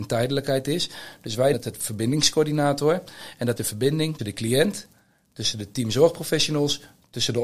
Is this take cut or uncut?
cut